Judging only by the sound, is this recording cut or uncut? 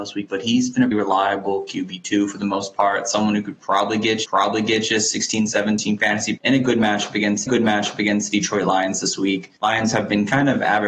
cut